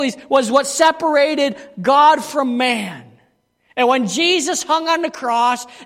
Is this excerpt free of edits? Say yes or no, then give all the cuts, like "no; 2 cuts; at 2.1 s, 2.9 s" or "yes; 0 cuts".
yes; 0 cuts